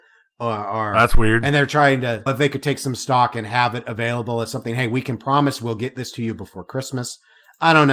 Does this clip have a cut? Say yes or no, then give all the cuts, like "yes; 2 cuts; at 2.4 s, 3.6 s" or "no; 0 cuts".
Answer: yes; 1 cut; at 2.3 s